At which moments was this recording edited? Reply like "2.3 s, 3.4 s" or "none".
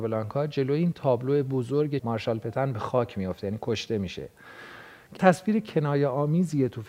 2.0 s, 5.2 s